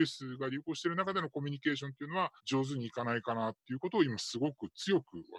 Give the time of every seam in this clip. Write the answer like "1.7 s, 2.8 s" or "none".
2.4 s